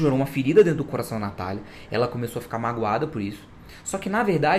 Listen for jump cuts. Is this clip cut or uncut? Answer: uncut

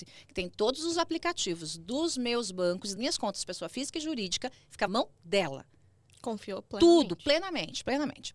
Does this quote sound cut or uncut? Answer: cut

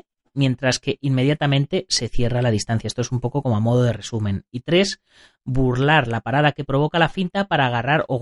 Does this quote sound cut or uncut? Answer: uncut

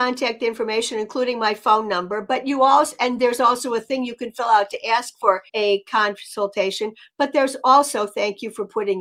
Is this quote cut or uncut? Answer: cut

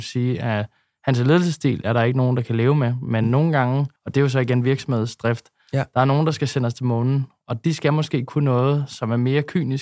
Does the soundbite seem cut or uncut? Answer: cut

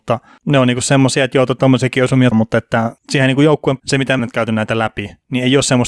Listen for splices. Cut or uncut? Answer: cut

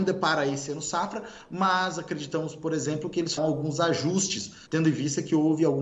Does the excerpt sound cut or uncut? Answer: cut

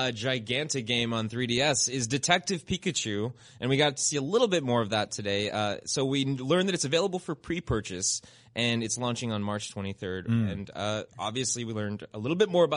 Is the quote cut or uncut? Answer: uncut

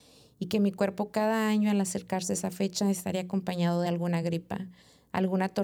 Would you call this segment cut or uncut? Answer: uncut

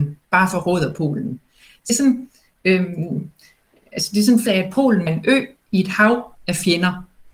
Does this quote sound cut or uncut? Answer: cut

